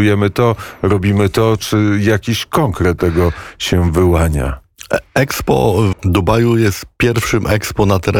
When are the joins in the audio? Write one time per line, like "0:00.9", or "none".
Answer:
0:03.0
0:05.9